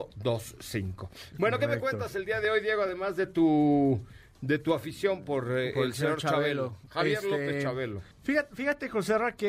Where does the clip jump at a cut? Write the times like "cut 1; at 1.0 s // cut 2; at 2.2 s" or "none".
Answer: cut 1; at 8.1 s